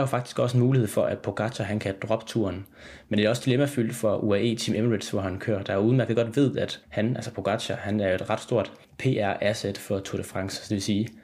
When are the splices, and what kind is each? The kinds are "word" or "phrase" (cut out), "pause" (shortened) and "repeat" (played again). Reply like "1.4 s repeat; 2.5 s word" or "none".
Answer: 6.8 s pause; 8.8 s pause